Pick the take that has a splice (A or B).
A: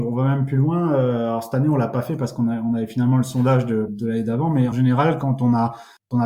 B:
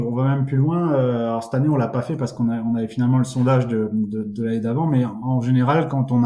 A